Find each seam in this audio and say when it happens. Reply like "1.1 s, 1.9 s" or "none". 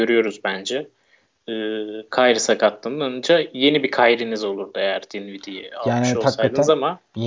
none